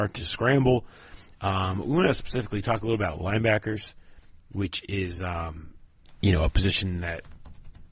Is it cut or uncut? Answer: uncut